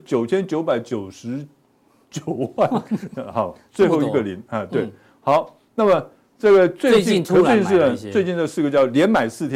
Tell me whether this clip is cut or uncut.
uncut